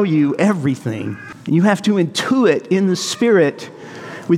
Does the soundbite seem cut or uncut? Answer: uncut